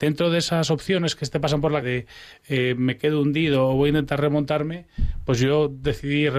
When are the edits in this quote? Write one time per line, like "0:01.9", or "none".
0:01.8